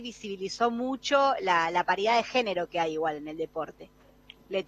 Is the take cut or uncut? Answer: uncut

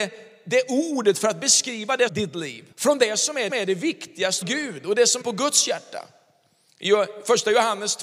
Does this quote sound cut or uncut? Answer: cut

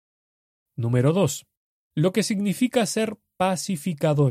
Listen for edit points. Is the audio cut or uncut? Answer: uncut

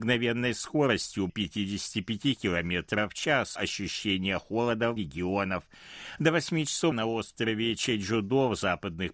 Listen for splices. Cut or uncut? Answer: cut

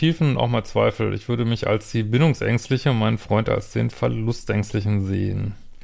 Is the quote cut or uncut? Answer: uncut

